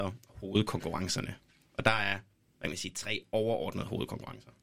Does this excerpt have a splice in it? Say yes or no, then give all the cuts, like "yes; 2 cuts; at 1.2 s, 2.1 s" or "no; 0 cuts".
no; 0 cuts